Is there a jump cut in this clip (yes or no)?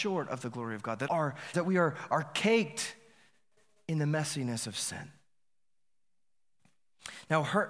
yes